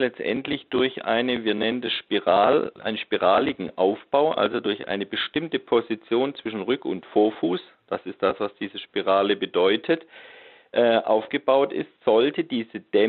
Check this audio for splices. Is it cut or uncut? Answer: uncut